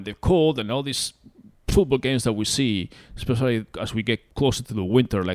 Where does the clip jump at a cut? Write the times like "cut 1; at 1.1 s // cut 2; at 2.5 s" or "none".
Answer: cut 1; at 4.3 s